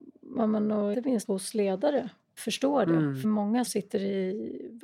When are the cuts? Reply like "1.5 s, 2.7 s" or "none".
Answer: 0.9 s, 1.2 s, 2.4 s, 3.2 s, 3.7 s